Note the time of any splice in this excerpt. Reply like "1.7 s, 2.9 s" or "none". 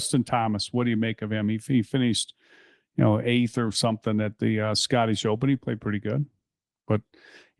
none